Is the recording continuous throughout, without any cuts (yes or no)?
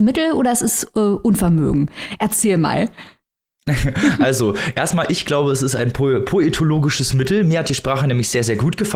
yes